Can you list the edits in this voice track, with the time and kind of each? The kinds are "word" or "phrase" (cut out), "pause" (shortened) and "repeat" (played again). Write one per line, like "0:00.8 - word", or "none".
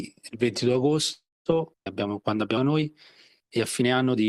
0:01.9 - word
0:02.6 - word